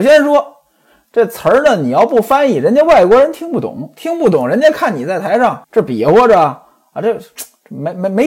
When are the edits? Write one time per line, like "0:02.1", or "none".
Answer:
0:05.6